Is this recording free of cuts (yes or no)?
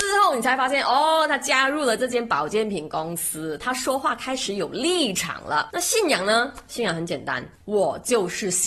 no